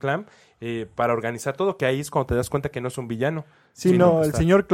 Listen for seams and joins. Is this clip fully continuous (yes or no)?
yes